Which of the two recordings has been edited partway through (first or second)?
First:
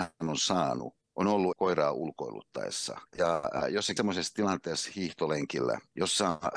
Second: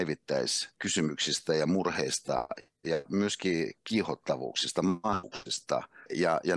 first